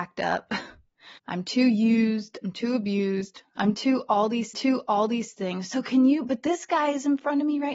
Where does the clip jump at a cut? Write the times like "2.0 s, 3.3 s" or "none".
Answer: 1.2 s, 4.5 s